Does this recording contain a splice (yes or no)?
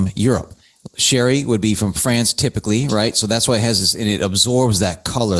no